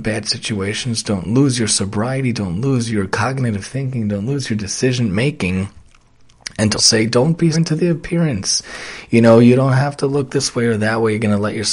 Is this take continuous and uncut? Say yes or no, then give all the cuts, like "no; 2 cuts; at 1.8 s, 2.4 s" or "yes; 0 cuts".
no; 2 cuts; at 6.8 s, 7.5 s